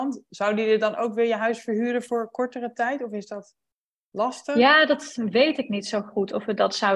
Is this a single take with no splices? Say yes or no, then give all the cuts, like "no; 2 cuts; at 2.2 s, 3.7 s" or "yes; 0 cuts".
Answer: yes; 0 cuts